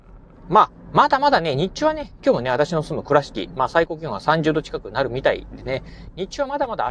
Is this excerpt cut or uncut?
cut